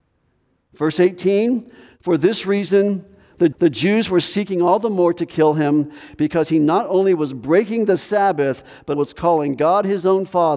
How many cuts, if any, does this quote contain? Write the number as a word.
two